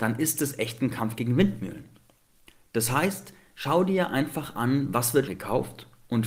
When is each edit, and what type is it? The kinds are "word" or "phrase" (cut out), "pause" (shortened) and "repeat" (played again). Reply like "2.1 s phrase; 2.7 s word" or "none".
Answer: 5.3 s word